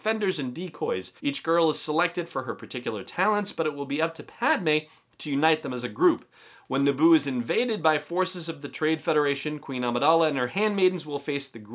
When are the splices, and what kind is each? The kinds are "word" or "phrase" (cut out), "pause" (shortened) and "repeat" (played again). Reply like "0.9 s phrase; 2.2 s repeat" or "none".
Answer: 1.2 s pause